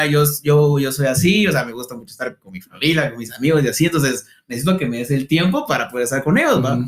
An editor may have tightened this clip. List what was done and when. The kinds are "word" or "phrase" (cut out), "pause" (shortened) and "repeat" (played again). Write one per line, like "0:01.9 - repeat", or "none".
none

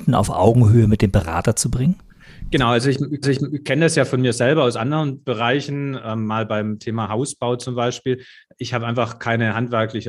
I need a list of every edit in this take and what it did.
0:03.2 - repeat

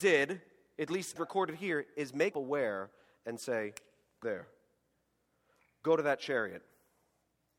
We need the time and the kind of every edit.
0:01.2 - word
0:02.3 - word
0:04.2 - word

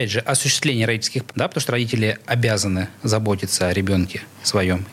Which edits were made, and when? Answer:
0:01.3 - word
0:03.0 - pause

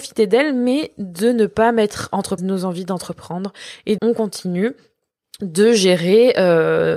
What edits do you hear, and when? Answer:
0:02.4 - word
0:04.0 - word

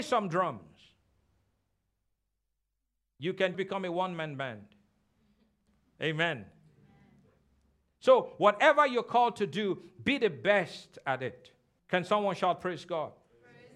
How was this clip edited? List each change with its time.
0:03.5 - word
0:11.8 - pause

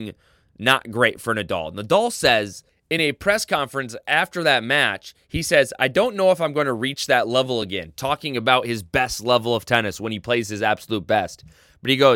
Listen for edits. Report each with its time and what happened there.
none

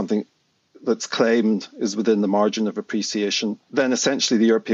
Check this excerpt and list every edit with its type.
0:03.6 - pause

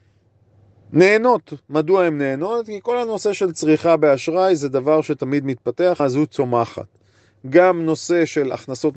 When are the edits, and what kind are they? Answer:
0:06.0 - word

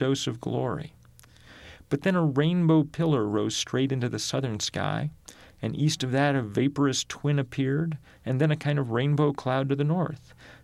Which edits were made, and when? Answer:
none

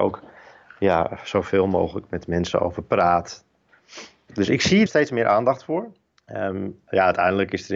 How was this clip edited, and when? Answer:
0:04.9 - word

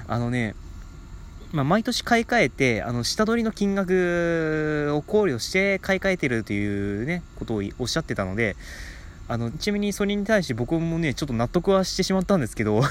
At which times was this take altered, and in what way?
0:09.5 - word

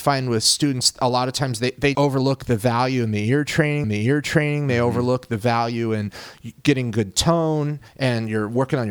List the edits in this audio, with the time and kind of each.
0:01.9 - word
0:03.8 - repeat
0:07.9 - pause

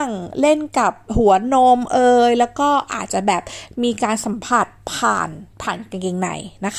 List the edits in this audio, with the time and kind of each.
0:05.5 - pause

